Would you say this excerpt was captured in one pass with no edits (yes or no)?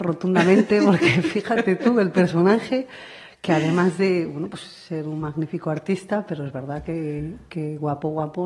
no